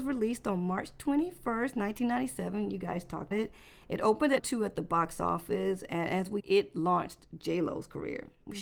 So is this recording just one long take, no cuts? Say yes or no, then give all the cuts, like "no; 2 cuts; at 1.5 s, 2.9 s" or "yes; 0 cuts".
no; 3 cuts; at 3.3 s, 4.4 s, 6.4 s